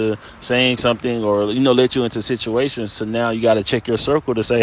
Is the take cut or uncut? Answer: uncut